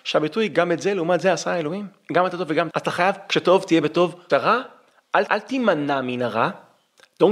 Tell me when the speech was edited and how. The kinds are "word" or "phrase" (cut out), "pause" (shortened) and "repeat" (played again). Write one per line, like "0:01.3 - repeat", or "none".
0:02.7 - word
0:04.3 - word
0:05.3 - word